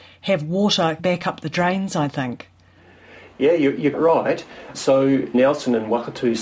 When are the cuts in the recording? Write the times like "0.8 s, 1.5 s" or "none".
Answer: 1.0 s, 3.9 s, 5.3 s